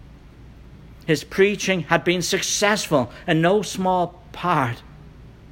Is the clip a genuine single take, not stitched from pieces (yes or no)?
yes